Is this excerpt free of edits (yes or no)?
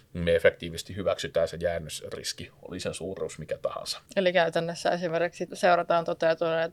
no